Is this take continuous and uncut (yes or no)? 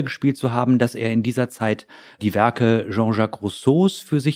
yes